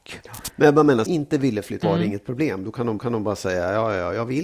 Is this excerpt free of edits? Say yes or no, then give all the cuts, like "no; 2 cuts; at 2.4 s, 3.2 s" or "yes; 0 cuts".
no; 3 cuts; at 1.1 s, 1.8 s, 3.0 s